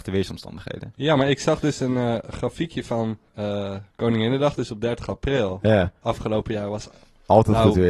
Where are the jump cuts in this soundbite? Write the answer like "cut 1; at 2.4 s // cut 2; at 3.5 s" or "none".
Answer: cut 1; at 3.3 s